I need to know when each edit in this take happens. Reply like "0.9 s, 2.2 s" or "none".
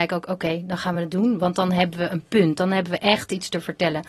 none